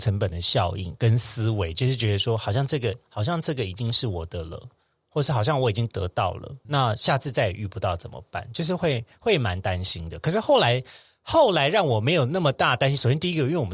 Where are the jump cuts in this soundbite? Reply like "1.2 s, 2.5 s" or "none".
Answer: 6.6 s